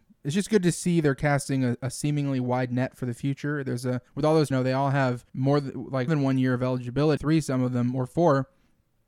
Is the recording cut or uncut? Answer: cut